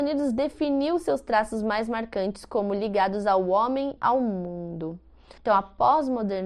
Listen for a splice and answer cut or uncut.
cut